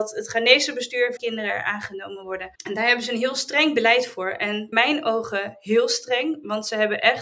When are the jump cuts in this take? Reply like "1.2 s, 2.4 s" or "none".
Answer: 1.2 s, 2.5 s, 4.7 s